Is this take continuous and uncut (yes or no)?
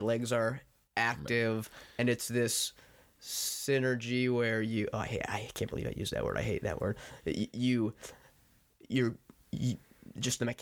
yes